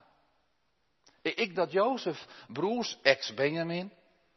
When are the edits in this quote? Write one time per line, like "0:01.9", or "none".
0:01.5